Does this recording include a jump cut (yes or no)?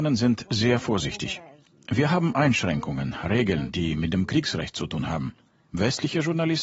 no